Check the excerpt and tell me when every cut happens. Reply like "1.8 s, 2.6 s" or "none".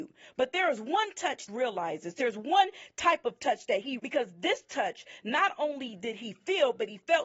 1.5 s, 4.0 s